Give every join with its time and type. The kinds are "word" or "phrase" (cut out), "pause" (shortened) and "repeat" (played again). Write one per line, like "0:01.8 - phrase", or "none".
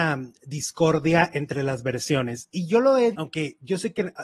0:03.1 - word